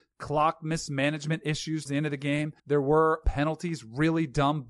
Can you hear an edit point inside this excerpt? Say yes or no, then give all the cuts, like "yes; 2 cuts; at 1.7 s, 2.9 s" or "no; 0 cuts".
yes; 3 cuts; at 1.9 s, 2.6 s, 3.2 s